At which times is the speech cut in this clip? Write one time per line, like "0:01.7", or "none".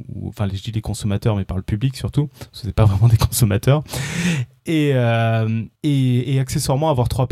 0:05.8